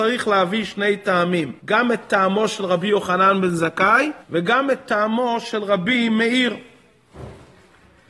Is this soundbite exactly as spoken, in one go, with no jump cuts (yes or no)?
no